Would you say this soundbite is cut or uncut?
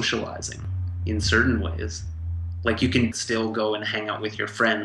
cut